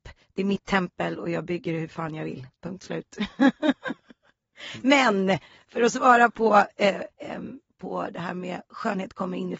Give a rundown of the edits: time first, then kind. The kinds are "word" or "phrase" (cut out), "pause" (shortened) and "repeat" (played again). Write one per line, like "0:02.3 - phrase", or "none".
0:02.5 - pause
0:07.1 - pause